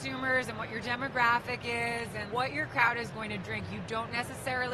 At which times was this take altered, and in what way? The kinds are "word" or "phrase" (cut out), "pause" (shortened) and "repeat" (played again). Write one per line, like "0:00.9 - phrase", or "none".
0:02.3 - word